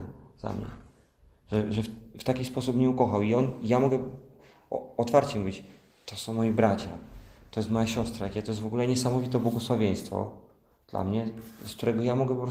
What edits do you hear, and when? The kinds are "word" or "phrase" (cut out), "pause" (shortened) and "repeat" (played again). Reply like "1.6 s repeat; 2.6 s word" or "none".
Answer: none